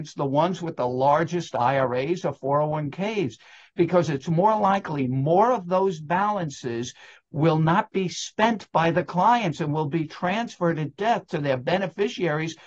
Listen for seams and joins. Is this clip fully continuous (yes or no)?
yes